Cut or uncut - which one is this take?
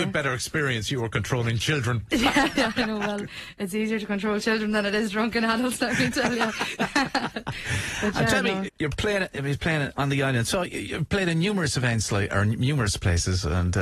cut